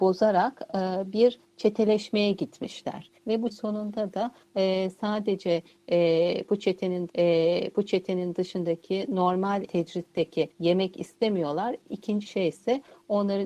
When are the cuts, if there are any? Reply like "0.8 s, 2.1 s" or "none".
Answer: 3.2 s, 3.5 s, 7.1 s, 9.7 s, 10.5 s, 12.2 s